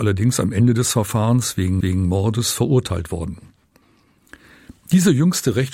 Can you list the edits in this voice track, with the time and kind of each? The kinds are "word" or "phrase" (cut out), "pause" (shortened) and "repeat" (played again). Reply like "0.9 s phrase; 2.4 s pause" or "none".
1.8 s repeat